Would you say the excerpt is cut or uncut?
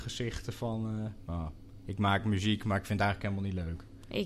uncut